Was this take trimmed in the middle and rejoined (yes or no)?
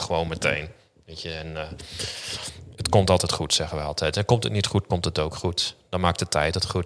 no